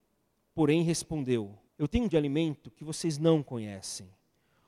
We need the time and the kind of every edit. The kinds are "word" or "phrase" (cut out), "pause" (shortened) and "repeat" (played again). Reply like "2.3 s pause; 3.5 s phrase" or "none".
1.7 s pause; 2.1 s word